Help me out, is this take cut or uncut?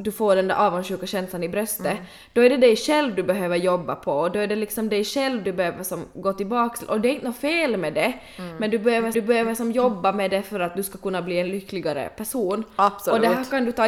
cut